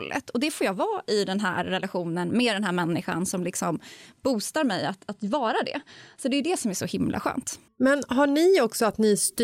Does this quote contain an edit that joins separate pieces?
yes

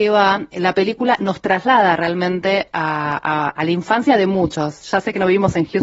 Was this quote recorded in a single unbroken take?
yes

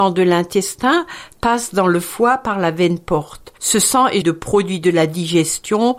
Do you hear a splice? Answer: yes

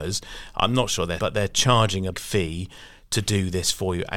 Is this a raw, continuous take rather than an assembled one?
no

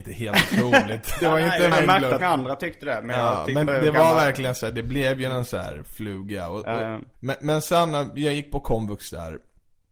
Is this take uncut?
no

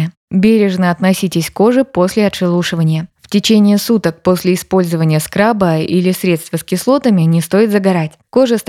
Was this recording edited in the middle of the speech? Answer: no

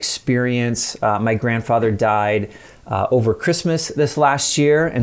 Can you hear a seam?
no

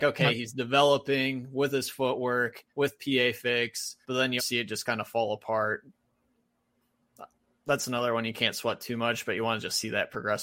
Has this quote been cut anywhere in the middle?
yes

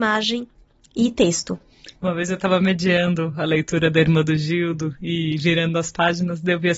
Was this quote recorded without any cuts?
yes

